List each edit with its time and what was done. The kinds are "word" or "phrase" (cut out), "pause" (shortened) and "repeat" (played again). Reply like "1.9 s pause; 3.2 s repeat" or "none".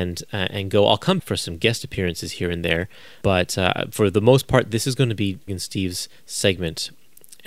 1.2 s word; 3.2 s word; 5.5 s word